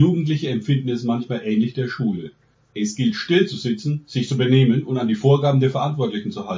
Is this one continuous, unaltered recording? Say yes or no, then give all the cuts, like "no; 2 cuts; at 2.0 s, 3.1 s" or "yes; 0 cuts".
yes; 0 cuts